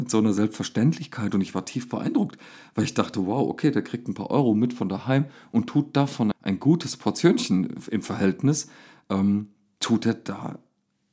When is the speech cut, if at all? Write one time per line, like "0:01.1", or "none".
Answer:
0:06.3